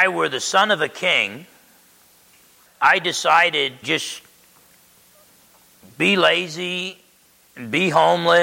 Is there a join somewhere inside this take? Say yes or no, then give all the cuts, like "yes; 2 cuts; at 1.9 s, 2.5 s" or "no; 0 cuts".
yes; 2 cuts; at 2.7 s, 3.8 s